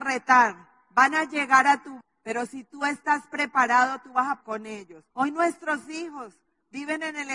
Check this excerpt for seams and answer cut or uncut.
cut